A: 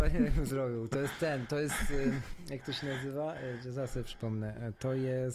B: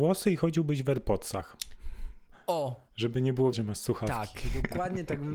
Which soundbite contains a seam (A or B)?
B